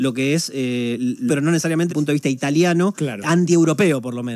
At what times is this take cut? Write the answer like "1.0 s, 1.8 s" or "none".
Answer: 1.3 s, 1.9 s